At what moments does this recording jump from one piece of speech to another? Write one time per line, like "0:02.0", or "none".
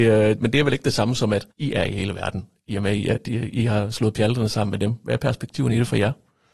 0:01.5